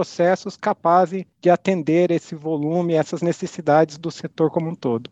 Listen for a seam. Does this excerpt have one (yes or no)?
no